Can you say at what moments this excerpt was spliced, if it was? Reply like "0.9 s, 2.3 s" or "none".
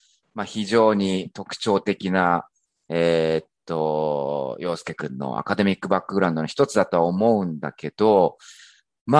none